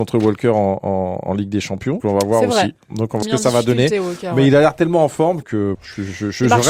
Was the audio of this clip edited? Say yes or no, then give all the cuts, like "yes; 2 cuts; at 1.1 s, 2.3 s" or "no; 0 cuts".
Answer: yes; 4 cuts; at 2.0 s, 3.2 s, 5.4 s, 5.7 s